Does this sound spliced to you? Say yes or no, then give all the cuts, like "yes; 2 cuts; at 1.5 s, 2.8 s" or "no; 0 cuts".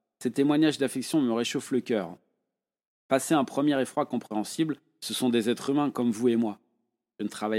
no; 0 cuts